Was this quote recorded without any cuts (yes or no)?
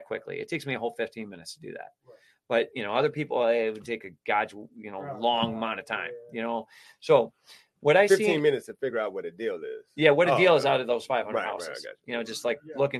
yes